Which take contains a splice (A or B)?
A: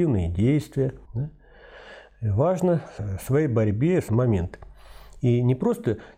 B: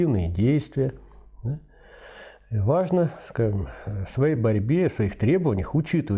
A